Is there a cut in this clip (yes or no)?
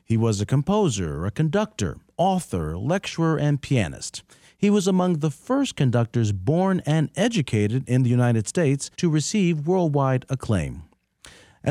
yes